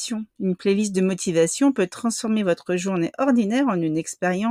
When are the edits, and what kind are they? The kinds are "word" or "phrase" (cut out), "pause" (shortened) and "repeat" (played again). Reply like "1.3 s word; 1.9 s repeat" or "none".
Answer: none